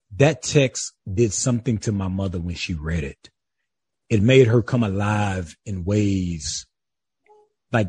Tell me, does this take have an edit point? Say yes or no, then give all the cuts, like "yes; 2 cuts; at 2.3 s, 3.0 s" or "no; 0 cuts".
no; 0 cuts